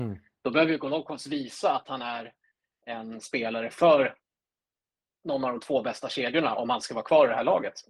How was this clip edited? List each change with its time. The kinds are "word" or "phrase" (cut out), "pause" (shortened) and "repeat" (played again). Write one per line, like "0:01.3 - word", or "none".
none